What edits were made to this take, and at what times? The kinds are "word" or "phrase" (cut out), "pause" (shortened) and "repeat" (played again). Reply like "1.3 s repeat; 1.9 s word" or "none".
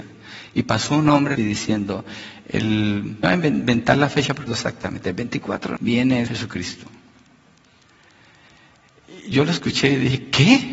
1.4 s phrase; 3.2 s word; 4.5 s phrase; 5.8 s word; 6.3 s word